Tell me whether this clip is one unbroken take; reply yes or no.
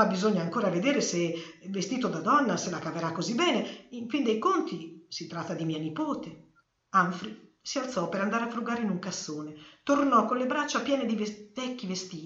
yes